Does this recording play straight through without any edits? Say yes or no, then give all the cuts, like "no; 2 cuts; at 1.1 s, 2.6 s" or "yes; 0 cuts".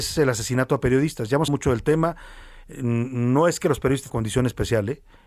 no; 2 cuts; at 1.5 s, 4.1 s